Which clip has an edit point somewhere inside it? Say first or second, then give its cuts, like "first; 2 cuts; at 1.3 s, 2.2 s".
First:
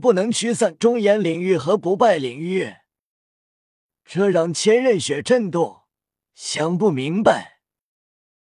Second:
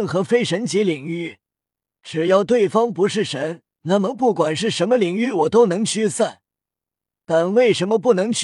second; 1 cut; at 3.7 s